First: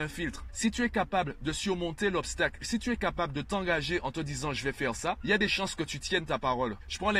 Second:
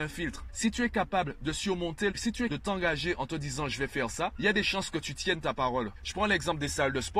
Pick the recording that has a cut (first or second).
second